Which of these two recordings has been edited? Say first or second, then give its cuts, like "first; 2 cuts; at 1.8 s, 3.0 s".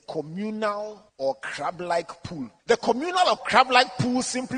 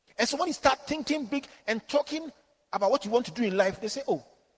first; 2 cuts; at 1.1 s, 2.6 s